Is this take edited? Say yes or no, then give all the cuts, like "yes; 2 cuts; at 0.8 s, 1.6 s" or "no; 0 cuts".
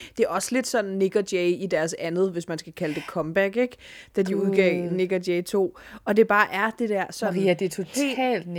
no; 0 cuts